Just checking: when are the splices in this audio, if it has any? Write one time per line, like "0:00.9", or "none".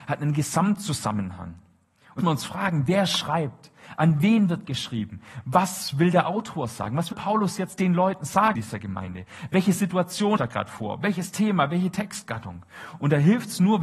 0:02.2
0:07.1
0:08.6
0:10.4

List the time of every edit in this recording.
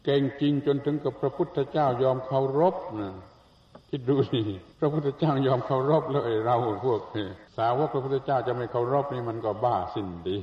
0:04.7
0:07.5

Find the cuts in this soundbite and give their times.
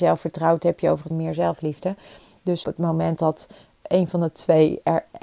0:01.1
0:02.6
0:03.2

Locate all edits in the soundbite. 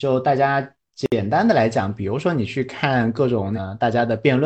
none

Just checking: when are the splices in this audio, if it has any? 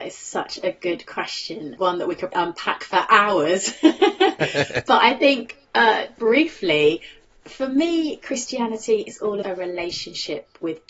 0:01.8
0:02.3
0:06.2
0:09.4

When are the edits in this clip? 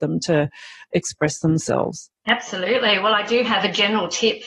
0:02.2

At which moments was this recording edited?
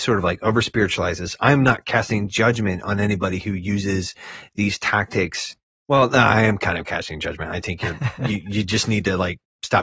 none

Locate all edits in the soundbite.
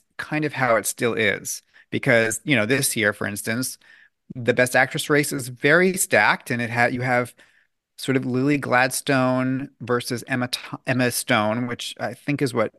none

